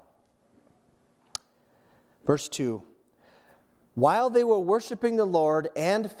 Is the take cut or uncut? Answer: uncut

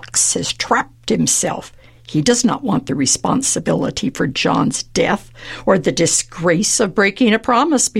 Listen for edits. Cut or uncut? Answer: uncut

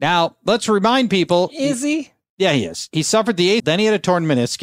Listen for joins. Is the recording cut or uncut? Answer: cut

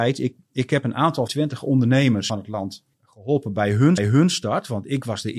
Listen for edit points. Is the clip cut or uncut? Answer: cut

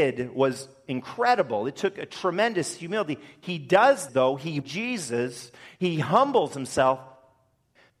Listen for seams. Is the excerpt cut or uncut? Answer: cut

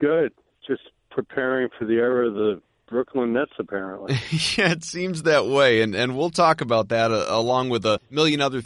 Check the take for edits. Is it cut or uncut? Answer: uncut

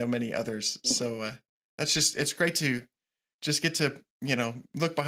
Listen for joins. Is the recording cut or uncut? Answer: uncut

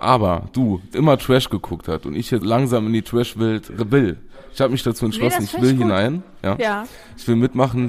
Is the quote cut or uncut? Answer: cut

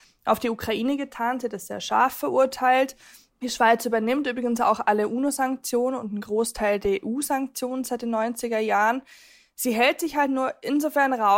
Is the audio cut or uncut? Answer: uncut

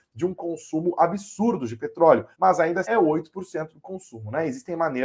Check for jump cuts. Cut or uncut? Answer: cut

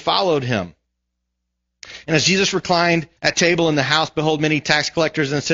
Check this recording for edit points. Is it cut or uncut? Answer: cut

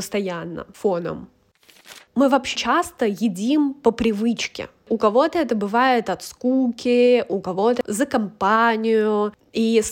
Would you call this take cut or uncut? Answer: cut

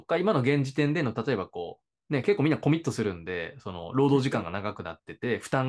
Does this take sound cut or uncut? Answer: uncut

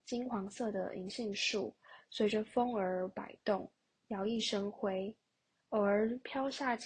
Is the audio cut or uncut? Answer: uncut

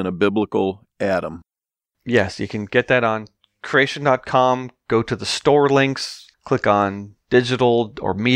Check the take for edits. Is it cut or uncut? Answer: cut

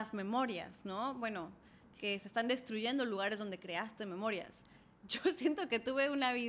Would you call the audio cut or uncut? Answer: uncut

